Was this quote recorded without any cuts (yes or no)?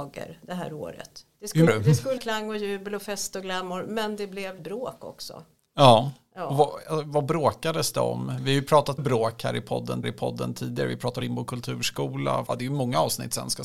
no